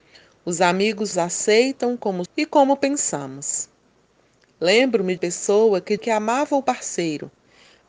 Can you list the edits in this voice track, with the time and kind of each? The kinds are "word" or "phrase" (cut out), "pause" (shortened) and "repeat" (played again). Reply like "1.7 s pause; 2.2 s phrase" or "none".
1.1 s word; 2.3 s word; 5.2 s word; 6.0 s word

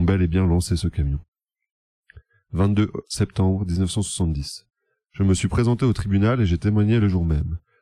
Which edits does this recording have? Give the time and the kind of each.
none

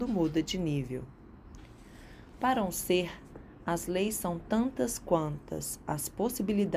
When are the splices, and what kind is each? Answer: none

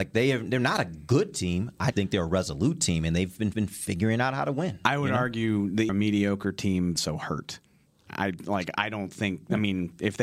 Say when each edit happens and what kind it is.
1.9 s word; 3.5 s repeat; 5.9 s phrase; 7.0 s phrase

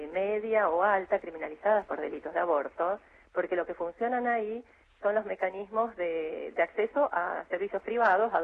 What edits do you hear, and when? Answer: none

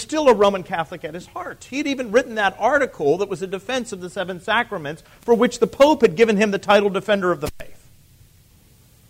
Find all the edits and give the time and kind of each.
none

